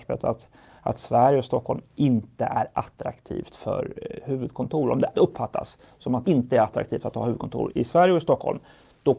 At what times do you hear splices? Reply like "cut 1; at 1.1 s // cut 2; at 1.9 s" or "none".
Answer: cut 1; at 5.1 s // cut 2; at 6.2 s // cut 3; at 7.7 s